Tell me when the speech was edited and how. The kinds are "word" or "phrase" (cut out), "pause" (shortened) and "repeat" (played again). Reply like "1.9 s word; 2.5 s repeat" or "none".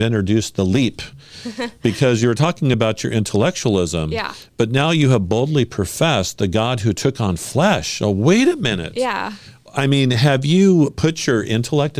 none